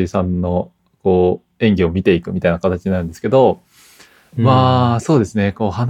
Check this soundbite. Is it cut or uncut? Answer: uncut